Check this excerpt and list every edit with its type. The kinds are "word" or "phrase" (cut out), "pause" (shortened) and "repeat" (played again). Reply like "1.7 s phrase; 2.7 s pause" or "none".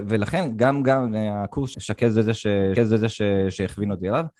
1.7 s phrase; 2.8 s repeat